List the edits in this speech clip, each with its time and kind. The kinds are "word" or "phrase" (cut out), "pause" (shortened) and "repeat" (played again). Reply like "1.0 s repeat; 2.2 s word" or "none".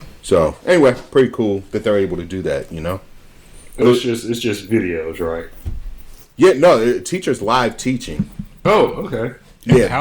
3.8 s word

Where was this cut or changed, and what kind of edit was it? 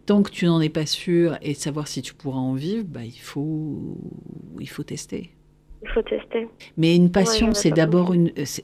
6.6 s pause

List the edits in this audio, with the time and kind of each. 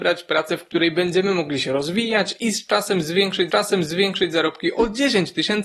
3.5 s repeat

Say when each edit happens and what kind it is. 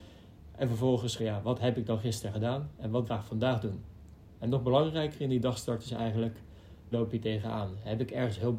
1.2 s phrase; 3.1 s phrase; 6.9 s word

